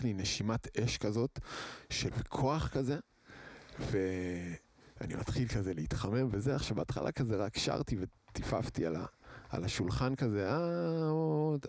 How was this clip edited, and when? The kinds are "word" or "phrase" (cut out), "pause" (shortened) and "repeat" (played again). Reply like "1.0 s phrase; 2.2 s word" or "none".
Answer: 2.1 s word